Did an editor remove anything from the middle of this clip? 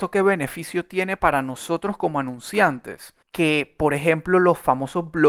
yes; 1 cut; at 3.2 s

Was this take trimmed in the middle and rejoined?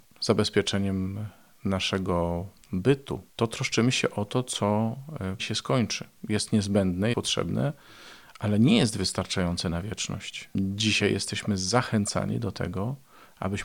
yes; 3 cuts; at 3.3 s, 5.4 s, 7.1 s

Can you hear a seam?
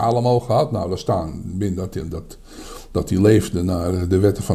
no; 0 cuts

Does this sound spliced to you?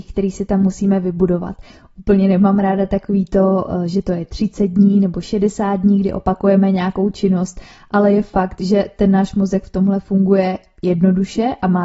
no; 0 cuts

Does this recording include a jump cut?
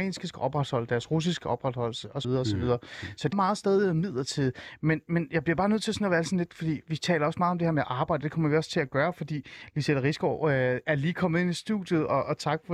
yes; 2 cuts; at 2.2 s, 3.3 s

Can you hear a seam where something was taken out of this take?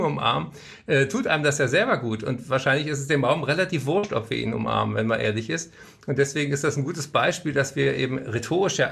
no; 0 cuts

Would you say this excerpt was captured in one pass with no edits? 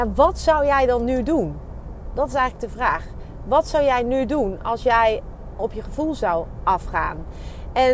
no; 1 cut; at 5.6 s

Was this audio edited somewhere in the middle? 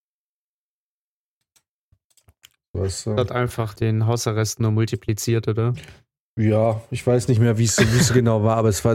yes; 1 cut; at 3.8 s

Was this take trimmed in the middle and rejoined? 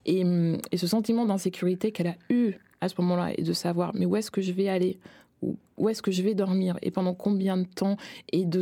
no; 0 cuts

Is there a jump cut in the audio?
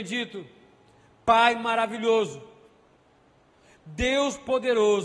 no; 0 cuts

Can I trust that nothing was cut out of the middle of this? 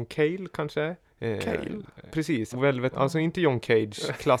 no; 4 cuts; at 1.0 s, 2.1 s, 2.5 s, 2.9 s

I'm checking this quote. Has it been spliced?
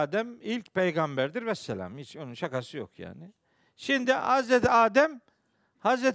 no; 0 cuts

